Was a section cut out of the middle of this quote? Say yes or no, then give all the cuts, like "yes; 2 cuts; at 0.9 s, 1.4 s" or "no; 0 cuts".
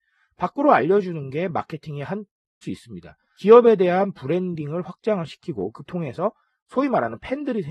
yes; 2 cuts; at 2.6 s, 5.8 s